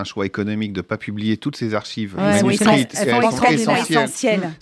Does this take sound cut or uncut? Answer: uncut